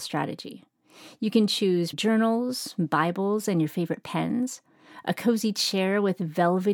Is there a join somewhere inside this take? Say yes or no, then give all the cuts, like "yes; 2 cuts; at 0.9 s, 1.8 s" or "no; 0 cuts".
yes; 1 cut; at 1.9 s